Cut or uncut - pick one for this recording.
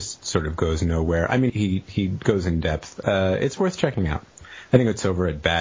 cut